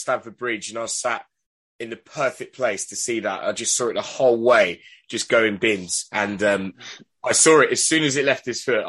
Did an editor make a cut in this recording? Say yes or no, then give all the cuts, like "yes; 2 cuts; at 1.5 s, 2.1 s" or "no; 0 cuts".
no; 0 cuts